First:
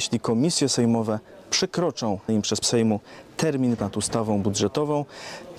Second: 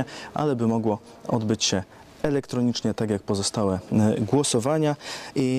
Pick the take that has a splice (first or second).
first